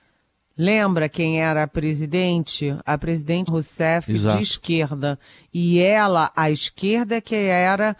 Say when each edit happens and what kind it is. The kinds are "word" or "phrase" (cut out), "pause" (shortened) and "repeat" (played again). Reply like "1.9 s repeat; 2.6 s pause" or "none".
3.5 s phrase